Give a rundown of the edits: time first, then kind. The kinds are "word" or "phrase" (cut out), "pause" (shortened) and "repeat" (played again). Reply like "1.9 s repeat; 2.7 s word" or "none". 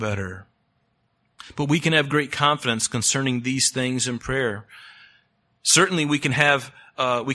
none